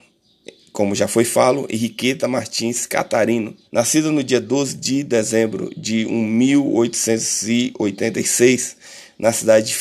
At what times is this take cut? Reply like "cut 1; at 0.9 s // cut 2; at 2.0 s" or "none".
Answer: cut 1; at 3.6 s

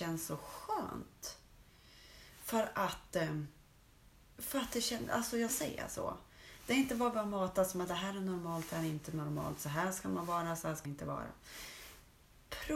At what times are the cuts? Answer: cut 1; at 5.5 s // cut 2; at 10.8 s

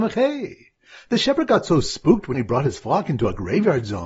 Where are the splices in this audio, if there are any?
cut 1; at 2.3 s

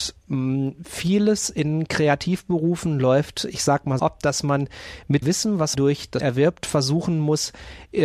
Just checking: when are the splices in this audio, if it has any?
cut 1; at 4.0 s // cut 2; at 5.2 s // cut 3; at 5.7 s // cut 4; at 6.2 s

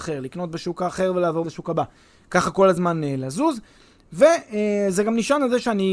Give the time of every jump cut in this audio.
cut 1; at 1.4 s

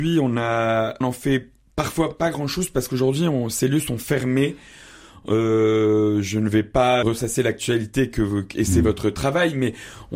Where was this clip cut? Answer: cut 1; at 1.0 s // cut 2; at 7.0 s

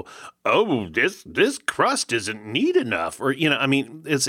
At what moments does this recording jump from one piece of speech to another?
none

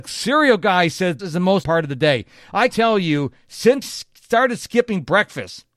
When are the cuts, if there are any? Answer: cut 1; at 1.2 s // cut 2; at 1.6 s // cut 3; at 2.7 s // cut 4; at 3.8 s

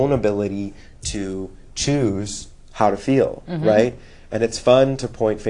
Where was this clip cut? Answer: none

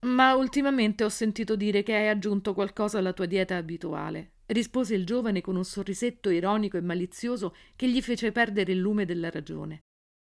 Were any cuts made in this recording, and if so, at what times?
cut 1; at 4.4 s

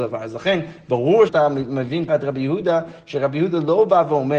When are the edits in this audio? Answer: cut 1; at 1.3 s // cut 2; at 2.1 s

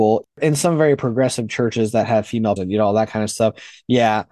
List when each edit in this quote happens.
cut 1; at 2.6 s

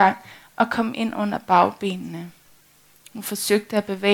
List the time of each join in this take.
none

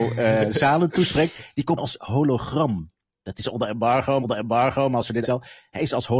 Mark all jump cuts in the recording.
cut 1; at 1.8 s // cut 2; at 4.2 s // cut 3; at 5.2 s

